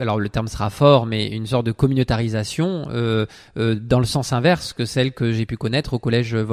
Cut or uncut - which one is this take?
uncut